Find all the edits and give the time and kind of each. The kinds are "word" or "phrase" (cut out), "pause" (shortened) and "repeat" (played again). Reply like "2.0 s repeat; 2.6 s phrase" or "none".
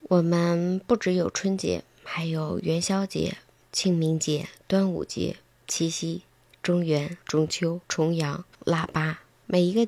3.6 s pause; 7.2 s pause; 7.8 s pause; 8.5 s pause